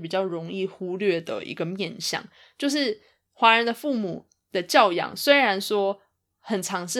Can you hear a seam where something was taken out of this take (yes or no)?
no